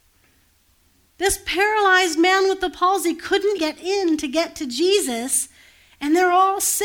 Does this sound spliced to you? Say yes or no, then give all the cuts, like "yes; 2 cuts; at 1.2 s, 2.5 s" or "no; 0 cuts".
yes; 1 cut; at 3.6 s